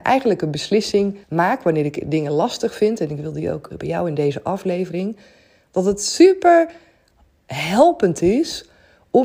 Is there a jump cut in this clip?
yes; 2 cuts; at 1.2 s, 3.8 s

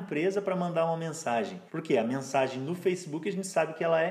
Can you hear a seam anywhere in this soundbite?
yes; 1 cut; at 1.7 s

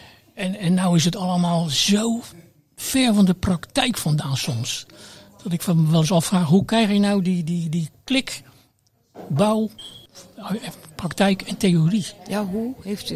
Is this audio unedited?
yes; 0 cuts

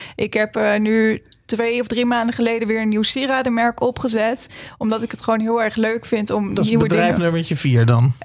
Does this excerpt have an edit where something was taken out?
no; 0 cuts

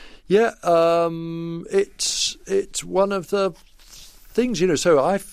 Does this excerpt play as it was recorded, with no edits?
yes; 0 cuts

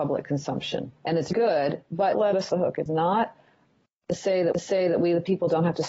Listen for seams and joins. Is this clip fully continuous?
no; 6 cuts; at 1.0 s, 1.3 s, 2.1 s, 2.5 s, 2.9 s, 4.5 s

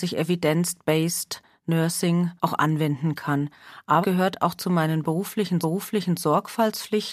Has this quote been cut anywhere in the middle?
yes; 3 cuts; at 2.4 s, 4.0 s, 5.6 s

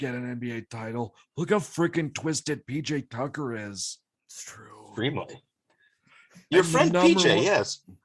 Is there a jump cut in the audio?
no; 0 cuts

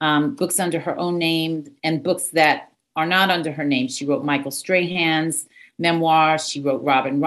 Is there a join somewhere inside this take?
no; 0 cuts

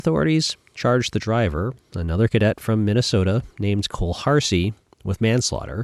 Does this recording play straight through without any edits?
yes; 0 cuts

